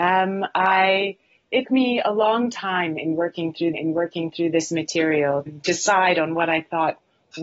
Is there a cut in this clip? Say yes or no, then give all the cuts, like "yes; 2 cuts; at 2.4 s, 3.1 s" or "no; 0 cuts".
yes; 3 cuts; at 1.6 s, 3.7 s, 5.5 s